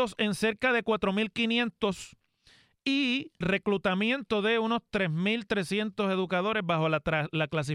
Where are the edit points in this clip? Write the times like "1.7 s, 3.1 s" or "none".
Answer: 3.4 s